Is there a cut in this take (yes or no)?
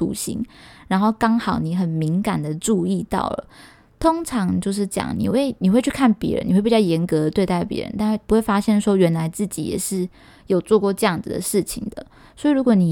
no